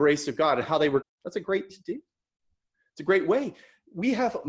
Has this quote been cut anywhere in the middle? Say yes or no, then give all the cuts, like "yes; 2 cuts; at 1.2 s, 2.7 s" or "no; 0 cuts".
yes; 2 cuts; at 1.0 s, 1.7 s